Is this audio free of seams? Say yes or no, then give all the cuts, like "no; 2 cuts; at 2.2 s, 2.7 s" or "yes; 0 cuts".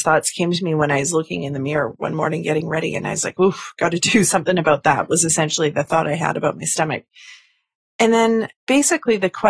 yes; 0 cuts